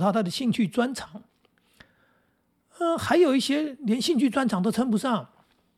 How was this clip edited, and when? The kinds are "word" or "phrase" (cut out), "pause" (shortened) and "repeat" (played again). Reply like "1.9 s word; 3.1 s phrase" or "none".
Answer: none